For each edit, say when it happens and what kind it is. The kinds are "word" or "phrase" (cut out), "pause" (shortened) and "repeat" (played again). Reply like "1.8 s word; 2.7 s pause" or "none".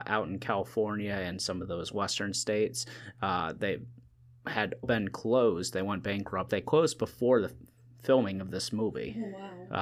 4.8 s word; 6.5 s phrase